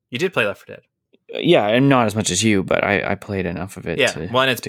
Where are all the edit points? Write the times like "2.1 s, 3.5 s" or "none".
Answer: none